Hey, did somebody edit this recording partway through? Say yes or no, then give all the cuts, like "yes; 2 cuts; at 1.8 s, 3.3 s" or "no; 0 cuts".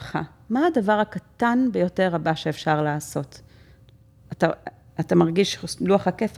no; 0 cuts